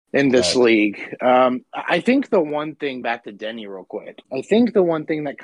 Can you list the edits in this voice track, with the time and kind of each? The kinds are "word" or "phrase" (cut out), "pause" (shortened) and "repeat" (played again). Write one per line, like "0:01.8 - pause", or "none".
0:03.0 - word
0:04.2 - pause